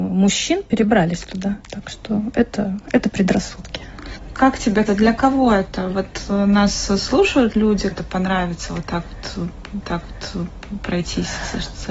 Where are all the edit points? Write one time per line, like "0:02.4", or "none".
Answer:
0:01.6
0:04.9
0:07.9
0:09.8